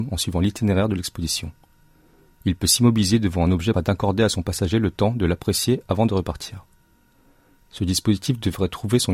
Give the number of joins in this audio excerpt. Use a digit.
1